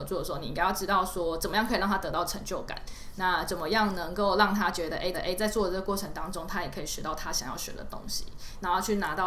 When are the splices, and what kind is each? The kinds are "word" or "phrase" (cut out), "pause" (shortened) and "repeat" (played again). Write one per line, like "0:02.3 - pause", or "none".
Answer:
0:05.1 - repeat